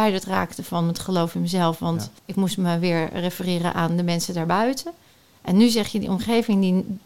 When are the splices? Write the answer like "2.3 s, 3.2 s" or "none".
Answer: 2.2 s

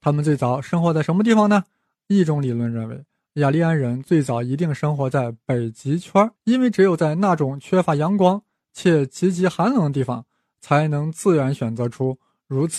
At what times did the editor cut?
6.4 s

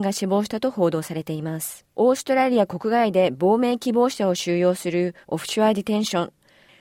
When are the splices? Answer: 1.9 s, 5.2 s

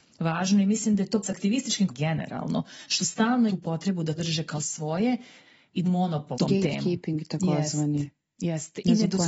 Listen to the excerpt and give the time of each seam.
1.2 s, 1.9 s, 3.5 s, 4.2 s, 4.5 s, 5.8 s, 6.3 s

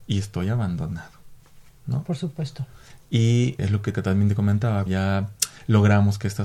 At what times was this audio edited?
3.6 s, 3.9 s, 4.9 s

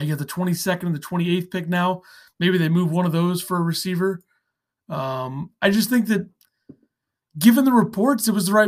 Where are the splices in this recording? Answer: none

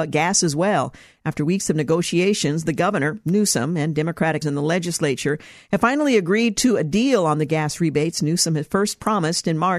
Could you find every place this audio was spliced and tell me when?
4.4 s

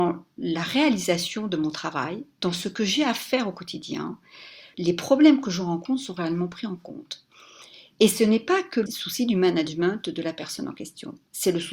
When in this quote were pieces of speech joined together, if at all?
4.7 s, 8.9 s

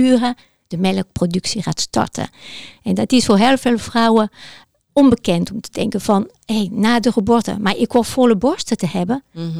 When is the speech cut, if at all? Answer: none

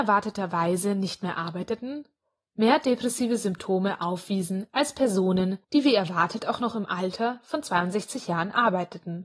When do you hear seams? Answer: 5.6 s

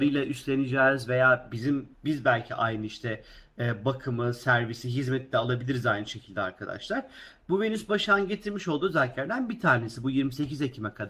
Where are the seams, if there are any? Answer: 1.9 s

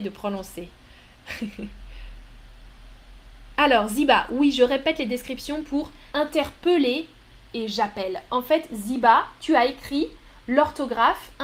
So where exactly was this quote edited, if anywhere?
6.1 s

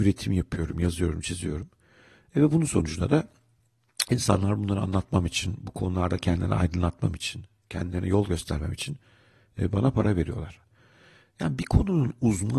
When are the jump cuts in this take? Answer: none

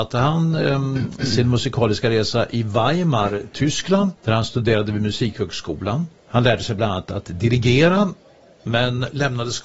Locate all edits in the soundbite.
4.2 s, 6.2 s

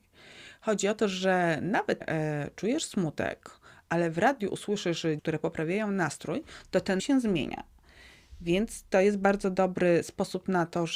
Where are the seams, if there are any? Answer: 2.0 s, 5.2 s, 7.0 s

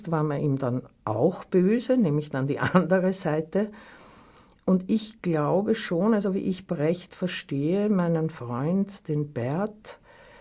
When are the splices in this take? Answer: none

